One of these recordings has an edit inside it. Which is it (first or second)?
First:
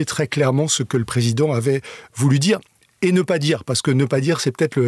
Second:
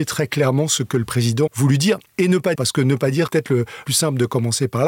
second